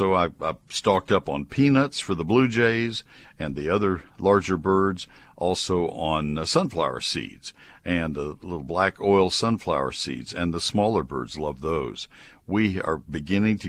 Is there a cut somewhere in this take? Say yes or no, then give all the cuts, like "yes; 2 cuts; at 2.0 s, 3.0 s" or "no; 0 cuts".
no; 0 cuts